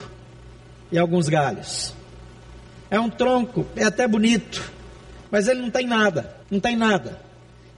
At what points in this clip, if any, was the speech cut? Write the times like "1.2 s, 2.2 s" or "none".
6.4 s